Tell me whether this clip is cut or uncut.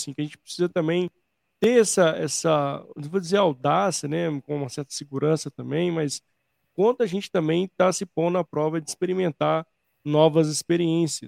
uncut